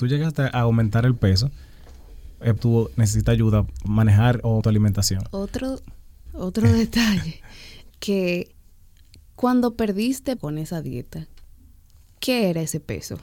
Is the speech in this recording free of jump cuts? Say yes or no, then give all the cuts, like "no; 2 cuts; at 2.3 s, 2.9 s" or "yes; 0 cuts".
no; 6 cuts; at 2.6 s, 3.8 s, 4.6 s, 6.3 s, 7.9 s, 10.4 s